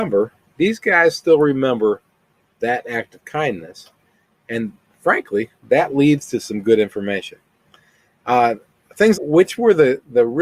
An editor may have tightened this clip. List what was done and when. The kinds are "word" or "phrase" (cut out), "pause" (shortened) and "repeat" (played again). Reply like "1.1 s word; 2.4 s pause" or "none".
9.1 s word